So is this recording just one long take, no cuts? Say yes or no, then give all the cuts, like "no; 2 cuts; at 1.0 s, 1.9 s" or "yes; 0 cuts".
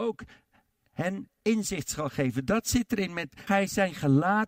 no; 1 cut; at 3.5 s